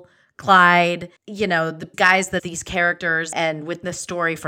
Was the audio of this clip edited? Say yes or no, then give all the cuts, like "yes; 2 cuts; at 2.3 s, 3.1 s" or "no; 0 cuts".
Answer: yes; 4 cuts; at 1.2 s, 1.9 s, 2.4 s, 3.3 s